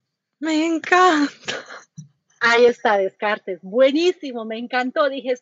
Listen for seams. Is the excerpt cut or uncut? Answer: uncut